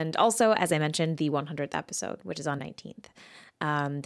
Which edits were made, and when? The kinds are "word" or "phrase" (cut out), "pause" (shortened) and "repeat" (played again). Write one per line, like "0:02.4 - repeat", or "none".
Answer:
0:02.6 - word